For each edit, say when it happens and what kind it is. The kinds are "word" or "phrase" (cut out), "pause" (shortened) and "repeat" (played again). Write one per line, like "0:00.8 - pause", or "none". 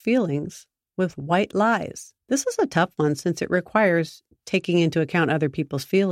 0:02.2 - pause